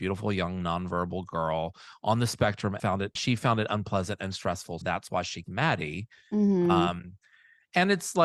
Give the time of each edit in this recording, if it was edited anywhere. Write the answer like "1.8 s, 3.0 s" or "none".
2.8 s, 3.2 s, 4.8 s, 5.4 s